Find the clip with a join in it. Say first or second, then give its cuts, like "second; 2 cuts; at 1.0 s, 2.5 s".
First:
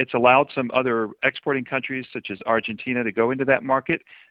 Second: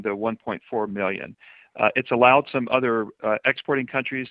first; 1 cut; at 1.2 s